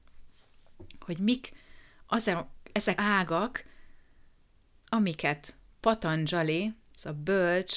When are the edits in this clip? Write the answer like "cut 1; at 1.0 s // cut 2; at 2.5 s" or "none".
cut 1; at 3.0 s